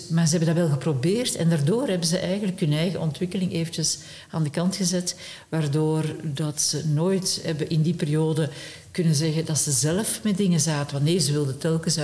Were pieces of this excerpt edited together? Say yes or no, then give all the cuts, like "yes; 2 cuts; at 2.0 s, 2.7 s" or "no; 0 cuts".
no; 0 cuts